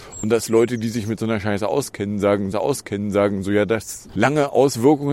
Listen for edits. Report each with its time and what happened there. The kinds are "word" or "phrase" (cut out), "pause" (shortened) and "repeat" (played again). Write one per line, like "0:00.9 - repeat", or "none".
0:02.5 - repeat
0:04.1 - word